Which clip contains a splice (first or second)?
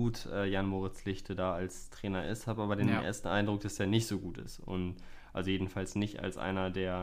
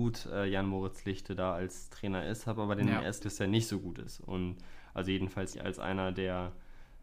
second